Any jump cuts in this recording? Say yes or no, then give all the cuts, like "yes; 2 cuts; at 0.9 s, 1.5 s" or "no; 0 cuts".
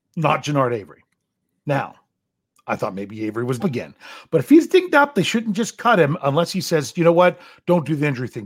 yes; 2 cuts; at 1.4 s, 3.6 s